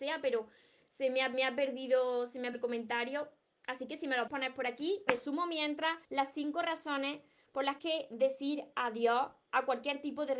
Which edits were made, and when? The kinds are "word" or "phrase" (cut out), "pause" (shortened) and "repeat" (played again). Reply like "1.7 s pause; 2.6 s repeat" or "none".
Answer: 1.3 s repeat; 2.5 s word; 4.3 s word; 5.1 s phrase; 6.0 s pause; 7.8 s phrase